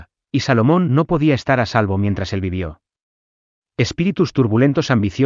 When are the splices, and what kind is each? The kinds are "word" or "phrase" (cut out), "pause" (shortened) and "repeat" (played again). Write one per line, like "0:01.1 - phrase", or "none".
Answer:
none